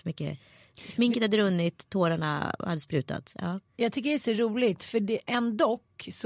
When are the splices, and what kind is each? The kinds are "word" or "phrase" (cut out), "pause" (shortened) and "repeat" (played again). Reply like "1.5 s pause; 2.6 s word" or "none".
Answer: none

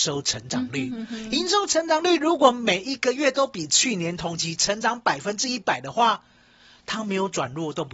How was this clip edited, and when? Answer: none

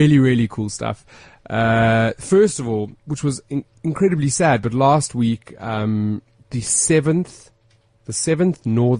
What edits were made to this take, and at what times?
none

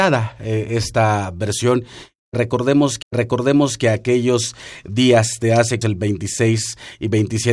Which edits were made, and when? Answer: 3.0 s repeat; 5.8 s phrase

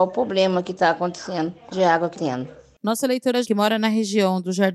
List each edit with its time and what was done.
1.7 s phrase; 2.1 s word; 3.4 s word

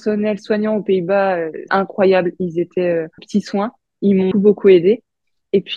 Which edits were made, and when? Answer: 1.7 s word; 3.2 s word; 4.3 s word

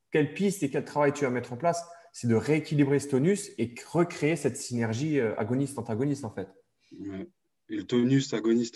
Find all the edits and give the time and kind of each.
none

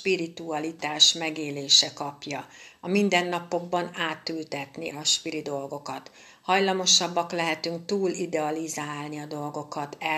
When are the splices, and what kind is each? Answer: 4.9 s word

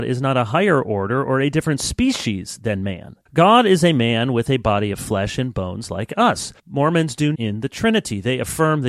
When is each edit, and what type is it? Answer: 3.3 s pause; 6.6 s pause; 7.3 s phrase

